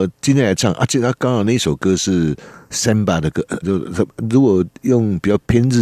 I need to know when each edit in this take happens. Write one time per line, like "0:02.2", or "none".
0:03.6